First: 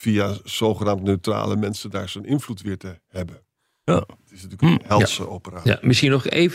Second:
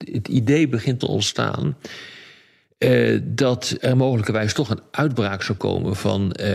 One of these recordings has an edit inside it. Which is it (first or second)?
second